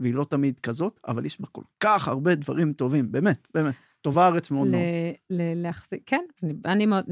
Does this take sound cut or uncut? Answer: uncut